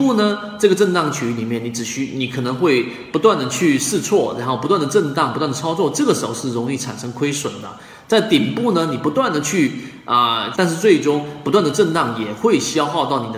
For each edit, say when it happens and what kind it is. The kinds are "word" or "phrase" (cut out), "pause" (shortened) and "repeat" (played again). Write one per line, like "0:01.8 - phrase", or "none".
0:10.5 - phrase